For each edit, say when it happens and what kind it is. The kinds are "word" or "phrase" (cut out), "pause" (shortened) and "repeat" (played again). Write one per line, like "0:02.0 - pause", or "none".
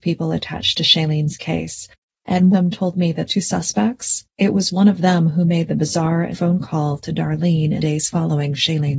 0:02.5 - phrase
0:03.3 - word
0:04.3 - pause
0:06.3 - word
0:07.8 - word